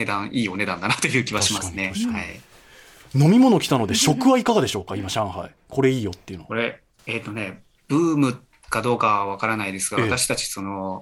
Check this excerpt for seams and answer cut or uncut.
cut